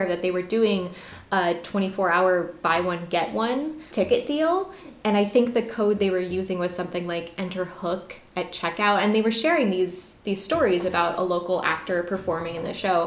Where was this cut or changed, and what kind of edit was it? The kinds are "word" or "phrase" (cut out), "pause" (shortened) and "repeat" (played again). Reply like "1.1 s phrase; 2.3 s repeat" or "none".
3.9 s word